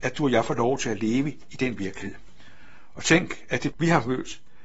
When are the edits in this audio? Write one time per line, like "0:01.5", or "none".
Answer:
0:03.7